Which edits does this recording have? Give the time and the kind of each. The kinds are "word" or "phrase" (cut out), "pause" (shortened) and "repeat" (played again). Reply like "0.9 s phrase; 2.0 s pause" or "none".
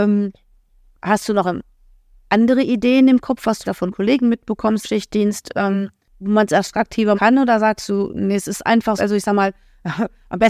3.6 s word; 4.8 s word; 7.1 s word; 9.0 s word